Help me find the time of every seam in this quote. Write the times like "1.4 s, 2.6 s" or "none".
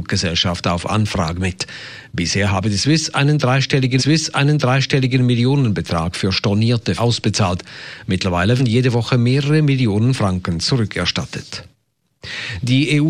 4.0 s, 7.0 s, 8.6 s